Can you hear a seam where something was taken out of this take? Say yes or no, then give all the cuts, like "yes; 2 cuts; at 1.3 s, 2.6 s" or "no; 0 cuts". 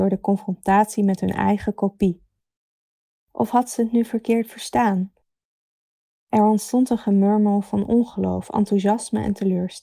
no; 0 cuts